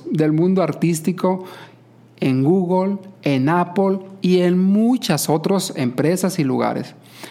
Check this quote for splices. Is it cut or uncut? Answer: uncut